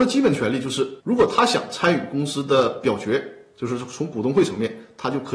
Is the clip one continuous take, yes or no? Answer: no